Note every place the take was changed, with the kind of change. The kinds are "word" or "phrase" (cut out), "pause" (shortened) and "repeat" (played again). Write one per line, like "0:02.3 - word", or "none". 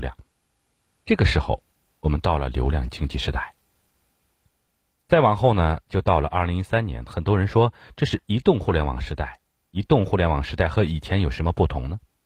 none